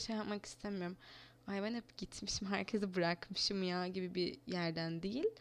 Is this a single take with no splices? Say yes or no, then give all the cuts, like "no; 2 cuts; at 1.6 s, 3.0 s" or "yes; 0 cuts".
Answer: yes; 0 cuts